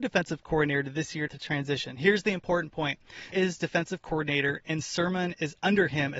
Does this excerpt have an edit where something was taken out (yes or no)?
yes